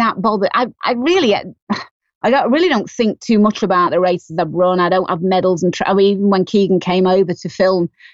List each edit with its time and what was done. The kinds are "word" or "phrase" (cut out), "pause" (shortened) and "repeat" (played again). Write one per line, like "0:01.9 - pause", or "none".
none